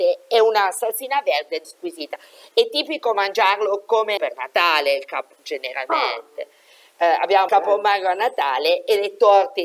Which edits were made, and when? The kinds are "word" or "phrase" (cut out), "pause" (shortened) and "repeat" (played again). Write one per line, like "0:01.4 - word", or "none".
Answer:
0:01.6 - word
0:04.2 - word
0:05.3 - word
0:07.5 - word